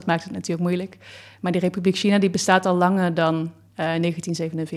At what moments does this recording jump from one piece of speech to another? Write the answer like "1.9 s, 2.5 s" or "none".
none